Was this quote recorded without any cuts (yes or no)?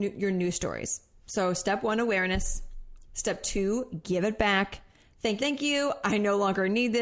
no